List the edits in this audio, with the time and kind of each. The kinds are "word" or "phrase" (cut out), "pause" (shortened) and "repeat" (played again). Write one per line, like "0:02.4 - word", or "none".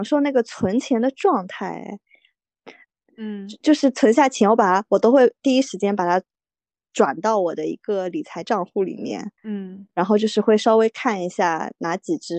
0:09.4 - pause